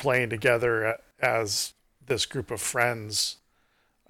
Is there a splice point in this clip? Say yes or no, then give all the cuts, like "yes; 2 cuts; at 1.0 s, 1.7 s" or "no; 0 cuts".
no; 0 cuts